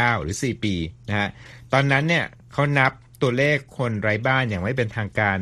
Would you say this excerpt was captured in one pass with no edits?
yes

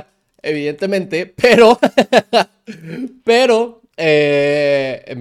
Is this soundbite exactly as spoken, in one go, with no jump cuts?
no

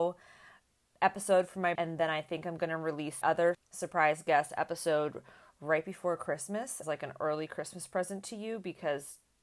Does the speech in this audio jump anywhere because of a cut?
yes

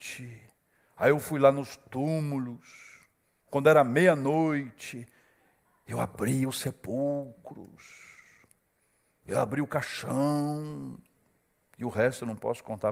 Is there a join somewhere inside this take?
no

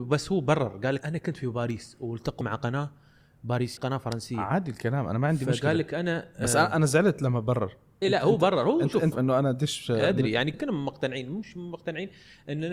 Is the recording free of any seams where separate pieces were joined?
no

